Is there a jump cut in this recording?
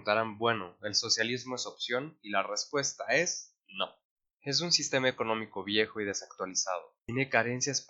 no; 0 cuts

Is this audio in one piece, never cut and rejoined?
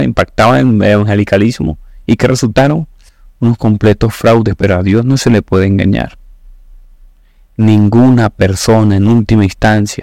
no; 1 cut; at 3.1 s

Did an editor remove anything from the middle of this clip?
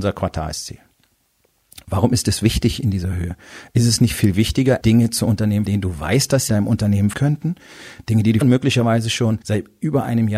yes; 6 cuts; at 4.8 s, 5.6 s, 6.5 s, 7.1 s, 8.4 s, 9.4 s

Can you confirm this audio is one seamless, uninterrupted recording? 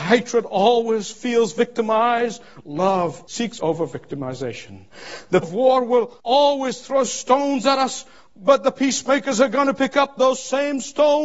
no; 3 cuts; at 3.6 s, 5.4 s, 6.2 s

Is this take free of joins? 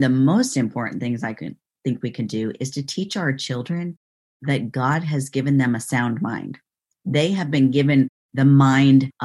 yes; 0 cuts

